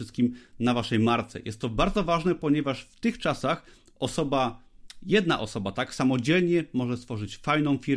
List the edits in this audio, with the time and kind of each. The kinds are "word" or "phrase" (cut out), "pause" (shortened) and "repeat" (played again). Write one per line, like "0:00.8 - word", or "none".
none